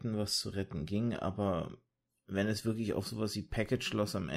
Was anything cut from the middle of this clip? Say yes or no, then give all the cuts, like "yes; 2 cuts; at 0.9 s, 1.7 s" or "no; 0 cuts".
no; 0 cuts